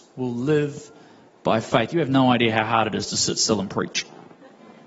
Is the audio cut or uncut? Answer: uncut